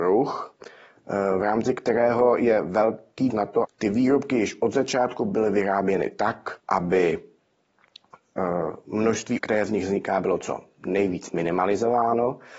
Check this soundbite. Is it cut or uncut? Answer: cut